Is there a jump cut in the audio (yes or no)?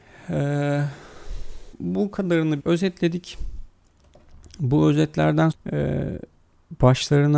yes